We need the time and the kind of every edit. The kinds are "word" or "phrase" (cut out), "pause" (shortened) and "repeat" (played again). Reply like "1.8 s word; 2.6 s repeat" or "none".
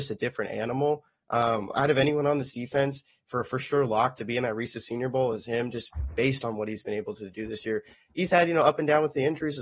none